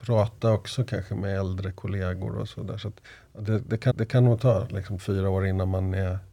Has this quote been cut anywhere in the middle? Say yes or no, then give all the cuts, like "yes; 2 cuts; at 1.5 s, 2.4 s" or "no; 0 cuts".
yes; 3 cuts; at 3.0 s, 3.9 s, 5.0 s